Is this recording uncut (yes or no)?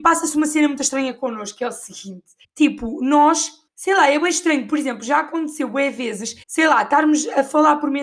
no